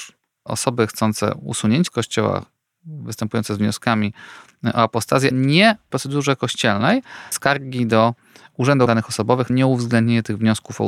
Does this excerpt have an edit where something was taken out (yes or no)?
yes